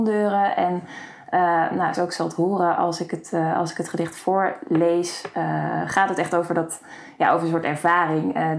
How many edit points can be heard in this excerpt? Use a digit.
1